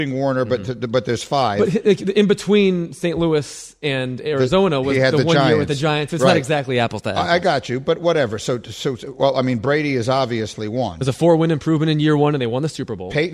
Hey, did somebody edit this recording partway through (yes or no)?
no